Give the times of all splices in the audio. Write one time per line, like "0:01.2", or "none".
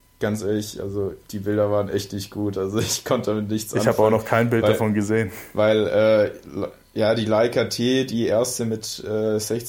0:01.2